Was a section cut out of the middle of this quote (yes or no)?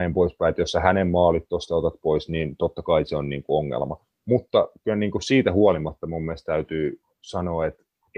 no